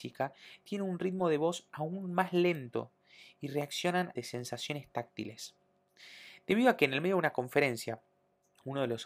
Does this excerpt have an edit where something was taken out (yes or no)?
yes